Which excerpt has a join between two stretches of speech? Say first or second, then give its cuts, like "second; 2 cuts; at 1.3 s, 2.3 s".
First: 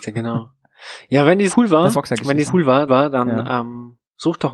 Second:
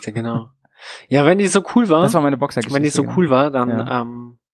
first; 4 cuts; at 1.5 s, 1.9 s, 2.5 s, 2.9 s